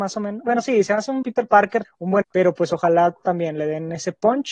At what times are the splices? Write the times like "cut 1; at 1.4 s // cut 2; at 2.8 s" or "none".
cut 1; at 1.2 s // cut 2; at 1.8 s // cut 3; at 2.2 s